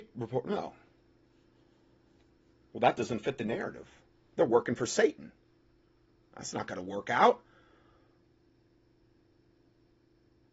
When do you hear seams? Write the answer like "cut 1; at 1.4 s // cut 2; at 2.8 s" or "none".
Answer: none